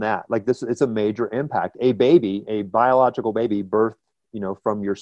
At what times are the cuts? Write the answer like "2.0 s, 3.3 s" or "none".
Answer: none